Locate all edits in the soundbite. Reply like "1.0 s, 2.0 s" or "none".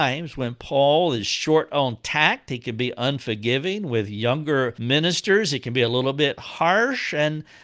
4.8 s